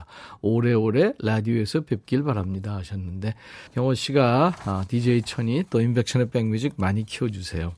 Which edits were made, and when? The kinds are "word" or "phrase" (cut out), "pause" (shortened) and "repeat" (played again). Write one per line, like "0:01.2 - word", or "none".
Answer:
0:03.7 - pause